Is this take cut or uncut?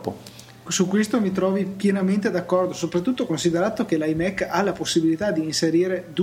uncut